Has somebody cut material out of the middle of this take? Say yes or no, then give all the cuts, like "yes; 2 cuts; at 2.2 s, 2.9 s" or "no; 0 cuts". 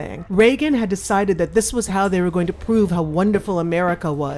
no; 0 cuts